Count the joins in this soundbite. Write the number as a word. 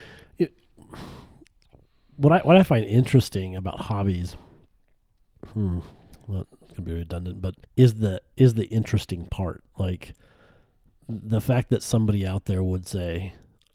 one